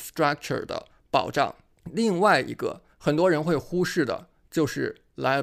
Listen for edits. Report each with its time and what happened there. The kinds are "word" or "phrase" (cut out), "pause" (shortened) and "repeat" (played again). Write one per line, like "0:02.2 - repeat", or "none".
0:01.7 - pause
0:02.9 - pause